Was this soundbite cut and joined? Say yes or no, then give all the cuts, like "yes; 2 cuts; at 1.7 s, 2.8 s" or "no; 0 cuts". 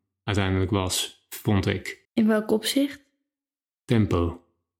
yes; 1 cut; at 2.0 s